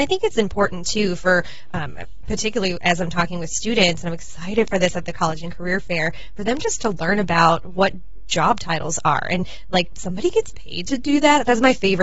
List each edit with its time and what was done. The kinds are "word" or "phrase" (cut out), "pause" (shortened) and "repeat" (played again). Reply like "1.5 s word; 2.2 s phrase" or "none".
none